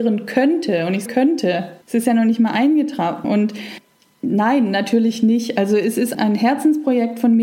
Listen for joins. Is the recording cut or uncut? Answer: cut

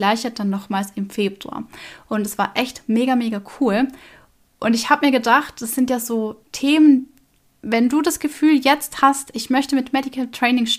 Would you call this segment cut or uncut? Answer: cut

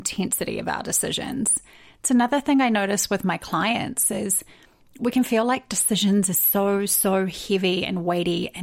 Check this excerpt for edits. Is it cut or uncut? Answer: uncut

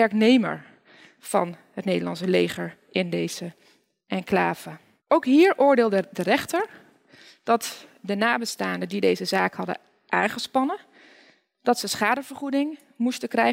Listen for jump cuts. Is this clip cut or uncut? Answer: uncut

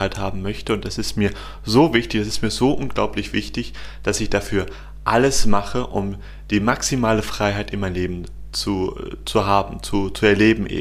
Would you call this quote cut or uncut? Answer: uncut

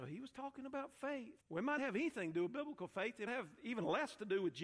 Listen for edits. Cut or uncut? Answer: cut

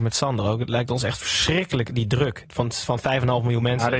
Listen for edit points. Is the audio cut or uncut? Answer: uncut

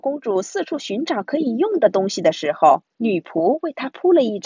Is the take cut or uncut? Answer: cut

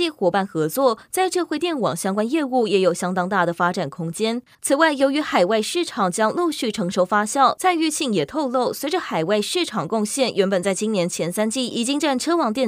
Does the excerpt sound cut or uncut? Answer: cut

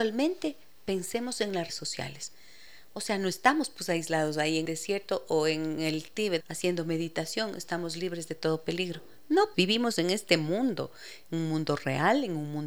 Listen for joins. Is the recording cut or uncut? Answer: cut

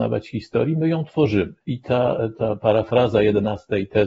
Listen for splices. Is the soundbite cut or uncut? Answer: cut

